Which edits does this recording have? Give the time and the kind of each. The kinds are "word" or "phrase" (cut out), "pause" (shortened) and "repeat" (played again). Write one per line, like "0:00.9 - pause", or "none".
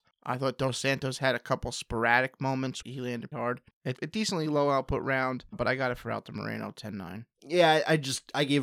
0:02.8 - word
0:03.3 - word
0:04.0 - word
0:05.5 - word